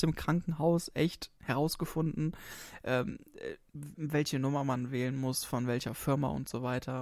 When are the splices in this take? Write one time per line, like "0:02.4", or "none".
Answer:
0:01.4

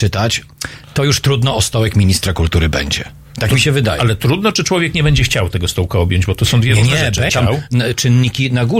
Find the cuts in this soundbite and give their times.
0:07.3

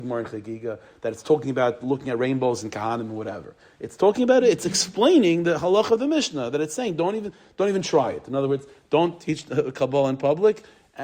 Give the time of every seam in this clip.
none

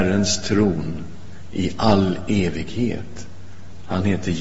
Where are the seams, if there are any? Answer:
none

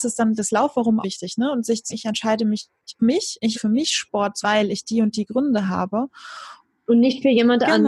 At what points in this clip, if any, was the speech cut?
0:01.0
0:01.9
0:03.0
0:03.5
0:04.4
0:06.8

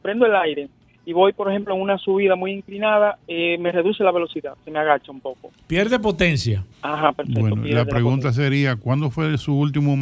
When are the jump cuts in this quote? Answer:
0:06.7

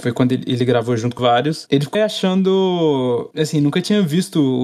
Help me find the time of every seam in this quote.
0:01.2
0:01.9

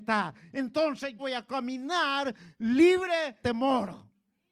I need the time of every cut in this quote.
0:01.2
0:03.4

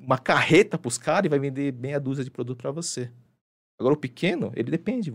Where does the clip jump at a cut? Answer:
none

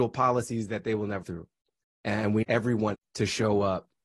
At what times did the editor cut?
0:01.2
0:02.4
0:02.9

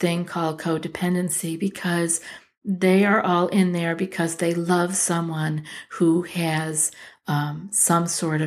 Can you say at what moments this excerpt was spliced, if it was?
none

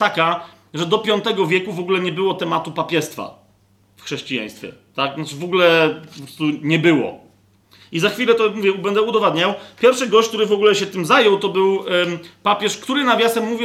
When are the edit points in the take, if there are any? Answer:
none

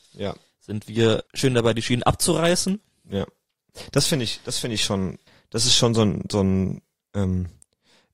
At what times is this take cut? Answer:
0:01.3
0:05.3

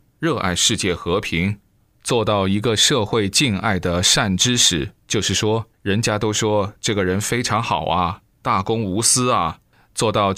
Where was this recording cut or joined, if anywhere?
0:05.0
0:05.7

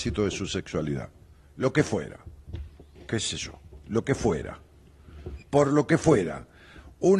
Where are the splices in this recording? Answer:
0:03.0
0:05.4

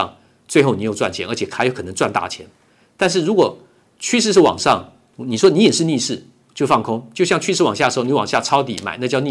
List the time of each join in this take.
none

